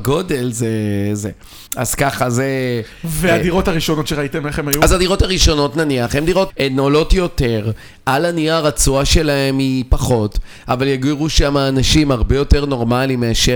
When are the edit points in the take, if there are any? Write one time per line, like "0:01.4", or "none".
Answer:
0:01.7
0:06.5